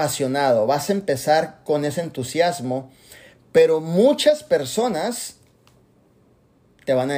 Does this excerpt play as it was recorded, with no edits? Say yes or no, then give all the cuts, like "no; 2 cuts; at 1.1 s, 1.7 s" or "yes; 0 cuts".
yes; 0 cuts